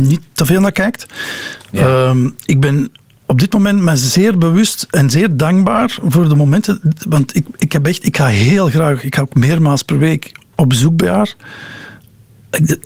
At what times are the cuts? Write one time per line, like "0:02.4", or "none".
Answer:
none